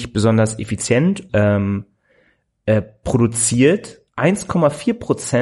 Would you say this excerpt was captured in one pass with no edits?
no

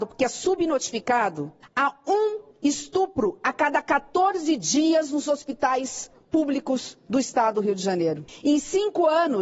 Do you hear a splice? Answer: no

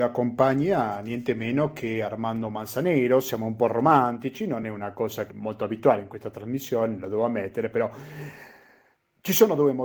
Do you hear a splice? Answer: no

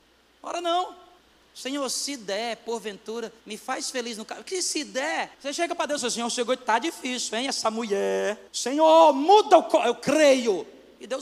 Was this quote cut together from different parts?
yes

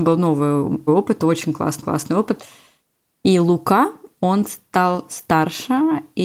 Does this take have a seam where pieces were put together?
yes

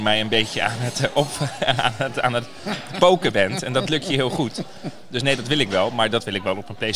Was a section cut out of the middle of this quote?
no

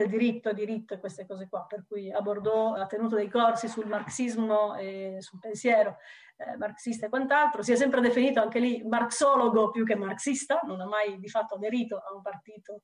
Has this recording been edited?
yes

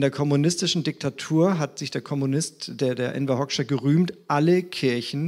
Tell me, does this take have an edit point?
no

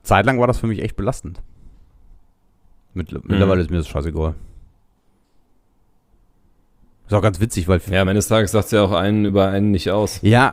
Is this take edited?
no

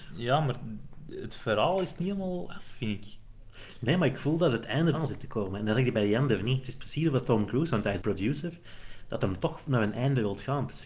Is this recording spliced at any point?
yes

